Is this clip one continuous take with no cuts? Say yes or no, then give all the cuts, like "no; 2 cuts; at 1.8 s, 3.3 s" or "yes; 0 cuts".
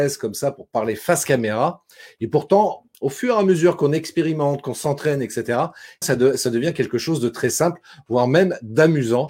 no; 2 cuts; at 2.9 s, 6.0 s